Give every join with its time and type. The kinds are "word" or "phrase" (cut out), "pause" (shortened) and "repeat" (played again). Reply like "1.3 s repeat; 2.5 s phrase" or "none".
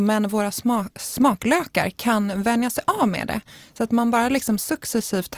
none